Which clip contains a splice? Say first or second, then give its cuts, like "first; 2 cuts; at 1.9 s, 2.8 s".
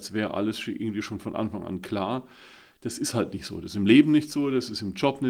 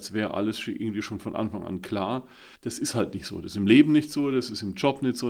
second; 1 cut; at 2.6 s